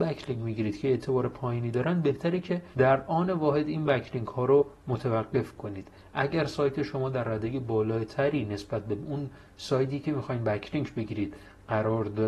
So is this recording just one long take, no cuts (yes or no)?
no